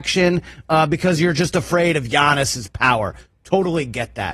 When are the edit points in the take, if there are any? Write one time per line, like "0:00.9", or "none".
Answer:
none